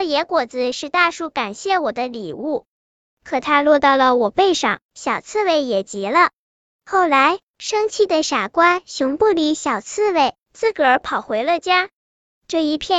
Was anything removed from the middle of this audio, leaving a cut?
no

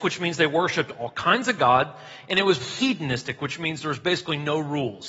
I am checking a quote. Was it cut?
yes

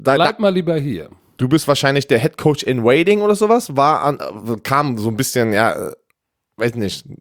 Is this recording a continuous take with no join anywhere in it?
yes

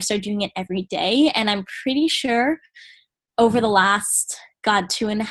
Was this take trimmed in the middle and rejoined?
no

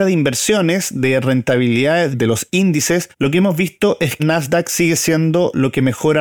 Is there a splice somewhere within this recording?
yes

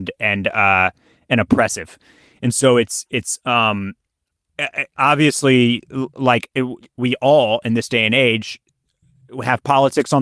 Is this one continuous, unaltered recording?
yes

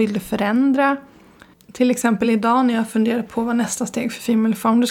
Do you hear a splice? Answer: no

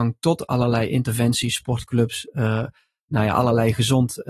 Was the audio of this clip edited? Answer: no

